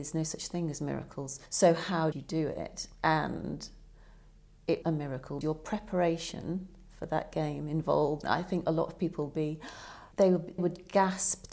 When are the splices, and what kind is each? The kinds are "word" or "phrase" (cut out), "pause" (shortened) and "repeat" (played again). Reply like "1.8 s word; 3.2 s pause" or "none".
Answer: 1.5 s pause; 2.1 s word; 4.8 s word; 5.4 s word; 8.2 s word; 10.1 s pause; 10.6 s word